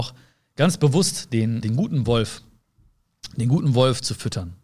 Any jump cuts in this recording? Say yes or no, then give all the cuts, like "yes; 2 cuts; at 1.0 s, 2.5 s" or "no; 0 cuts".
yes; 1 cut; at 1.6 s